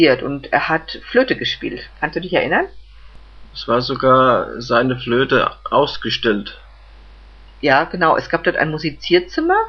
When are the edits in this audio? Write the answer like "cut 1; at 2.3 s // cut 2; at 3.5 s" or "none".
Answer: none